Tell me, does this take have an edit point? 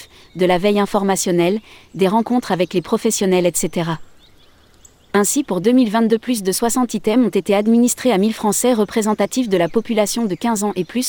no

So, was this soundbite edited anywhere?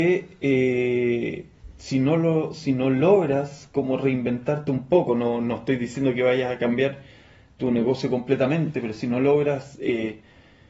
no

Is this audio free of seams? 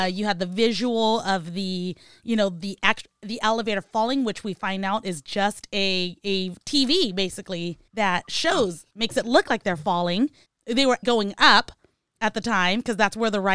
no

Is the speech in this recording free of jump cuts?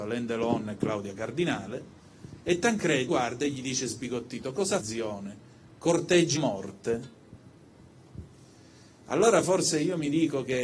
no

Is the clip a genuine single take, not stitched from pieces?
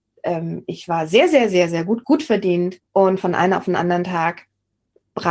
no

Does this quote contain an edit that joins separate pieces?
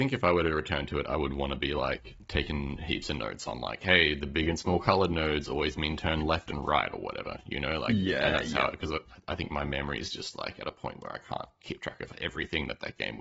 no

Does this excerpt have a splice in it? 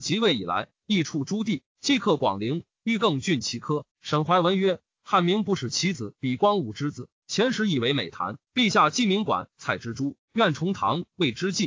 yes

